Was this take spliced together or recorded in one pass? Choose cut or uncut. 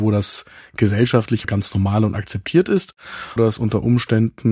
cut